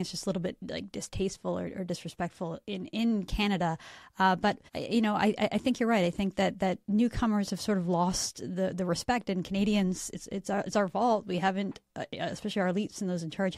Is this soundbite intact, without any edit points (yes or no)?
no